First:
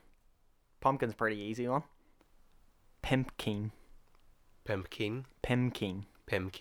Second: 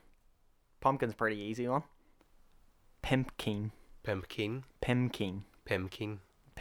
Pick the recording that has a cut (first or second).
second